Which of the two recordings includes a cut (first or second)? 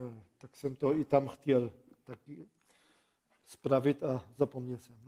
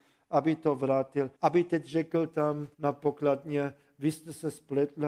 second